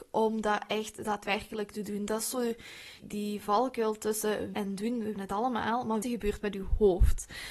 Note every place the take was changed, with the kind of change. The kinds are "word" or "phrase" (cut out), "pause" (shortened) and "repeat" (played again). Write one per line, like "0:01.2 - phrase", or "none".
0:03.0 - word
0:04.5 - word
0:05.1 - word
0:06.0 - word